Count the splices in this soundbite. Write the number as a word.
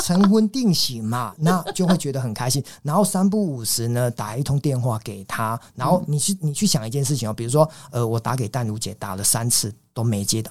zero